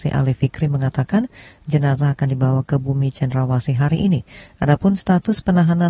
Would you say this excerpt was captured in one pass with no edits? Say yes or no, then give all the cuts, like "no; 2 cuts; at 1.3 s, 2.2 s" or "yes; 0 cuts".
yes; 0 cuts